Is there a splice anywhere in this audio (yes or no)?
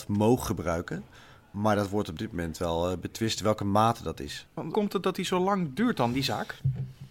yes